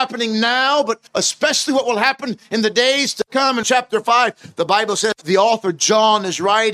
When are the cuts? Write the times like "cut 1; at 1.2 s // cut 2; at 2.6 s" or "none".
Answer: cut 1; at 1.1 s // cut 2; at 3.6 s // cut 3; at 5.2 s